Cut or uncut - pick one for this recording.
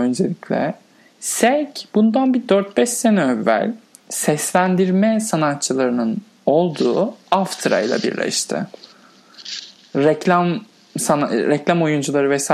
uncut